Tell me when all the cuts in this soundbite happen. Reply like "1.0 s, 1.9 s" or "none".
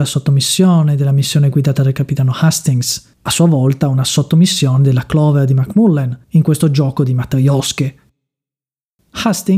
3.1 s